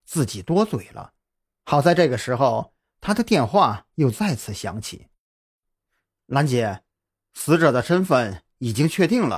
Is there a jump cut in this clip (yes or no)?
no